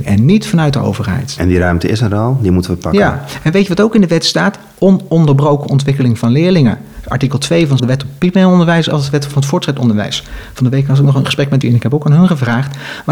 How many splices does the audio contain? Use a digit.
2